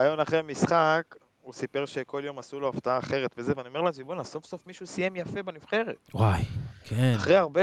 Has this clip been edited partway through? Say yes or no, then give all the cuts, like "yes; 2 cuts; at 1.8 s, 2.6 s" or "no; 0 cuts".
no; 0 cuts